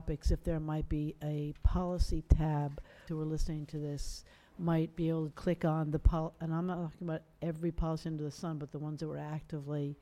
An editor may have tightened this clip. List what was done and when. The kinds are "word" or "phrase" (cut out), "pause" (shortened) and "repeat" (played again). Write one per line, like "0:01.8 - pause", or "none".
0:03.1 - phrase
0:05.3 - word